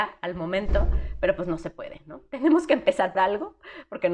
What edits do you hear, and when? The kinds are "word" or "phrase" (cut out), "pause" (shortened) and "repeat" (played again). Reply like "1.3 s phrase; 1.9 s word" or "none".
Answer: 3.1 s word